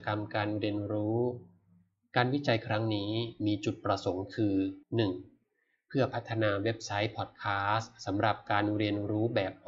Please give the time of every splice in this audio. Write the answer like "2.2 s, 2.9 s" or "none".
4.8 s